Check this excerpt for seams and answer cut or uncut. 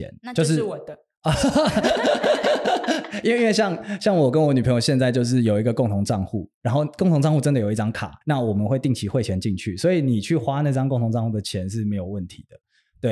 cut